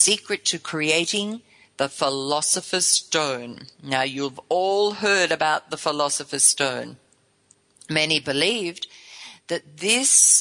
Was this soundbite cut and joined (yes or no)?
no